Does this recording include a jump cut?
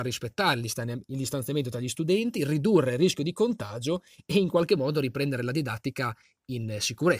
no; 0 cuts

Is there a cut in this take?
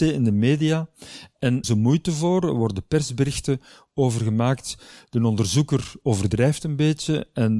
yes; 1 cut; at 1.6 s

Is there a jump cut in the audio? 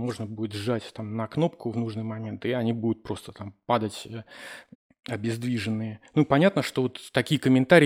yes; 1 cut; at 4.7 s

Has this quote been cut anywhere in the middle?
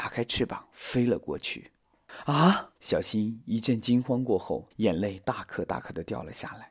yes; 2 cuts; at 2.8 s, 4.7 s

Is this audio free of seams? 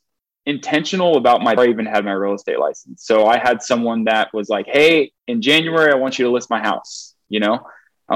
no; 2 cuts; at 1.6 s, 5.2 s

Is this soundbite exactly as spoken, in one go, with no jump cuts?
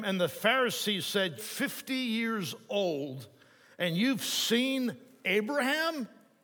no; 1 cut; at 1.4 s

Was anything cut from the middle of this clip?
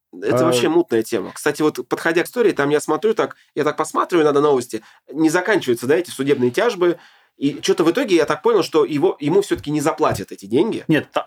yes; 1 cut; at 2.3 s

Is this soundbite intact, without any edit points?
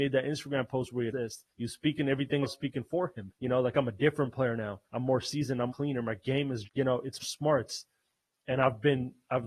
no; 8 cuts; at 1.1 s, 1.5 s, 2.4 s, 3.4 s, 4.8 s, 5.7 s, 6.6 s, 7.2 s

